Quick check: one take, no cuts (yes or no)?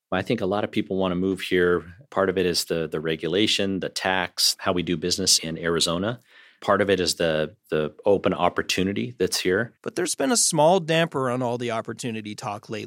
yes